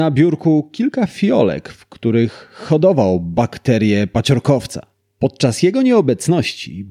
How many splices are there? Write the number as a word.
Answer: one